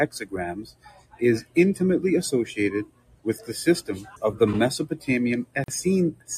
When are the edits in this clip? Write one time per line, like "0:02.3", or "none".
0:04.2